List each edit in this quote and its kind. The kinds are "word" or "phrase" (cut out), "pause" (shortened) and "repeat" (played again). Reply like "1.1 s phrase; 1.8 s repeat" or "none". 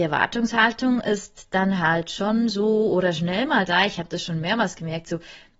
none